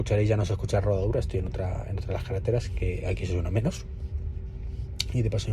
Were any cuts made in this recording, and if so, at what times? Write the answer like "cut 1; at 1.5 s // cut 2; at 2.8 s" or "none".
none